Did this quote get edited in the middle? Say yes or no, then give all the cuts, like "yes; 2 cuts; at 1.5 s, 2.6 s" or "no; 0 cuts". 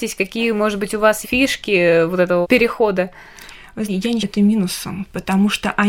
yes; 4 cuts; at 1.2 s, 2.4 s, 3.9 s, 4.2 s